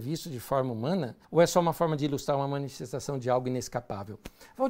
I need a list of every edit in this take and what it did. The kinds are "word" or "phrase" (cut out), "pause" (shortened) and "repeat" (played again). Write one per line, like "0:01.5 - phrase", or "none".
0:01.2 - pause